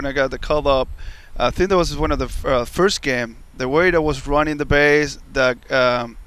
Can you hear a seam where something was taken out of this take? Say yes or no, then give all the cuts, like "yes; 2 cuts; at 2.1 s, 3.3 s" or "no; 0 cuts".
no; 0 cuts